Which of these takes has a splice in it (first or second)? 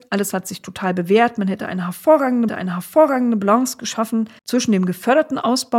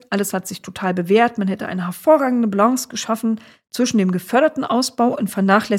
first